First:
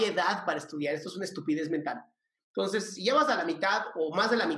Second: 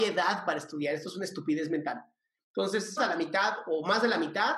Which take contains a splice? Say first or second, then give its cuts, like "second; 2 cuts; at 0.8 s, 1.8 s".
second; 1 cut; at 3.0 s